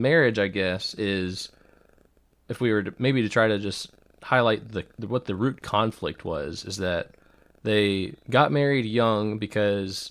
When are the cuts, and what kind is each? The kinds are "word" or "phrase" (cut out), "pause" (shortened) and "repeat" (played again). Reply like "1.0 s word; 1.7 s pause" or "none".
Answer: none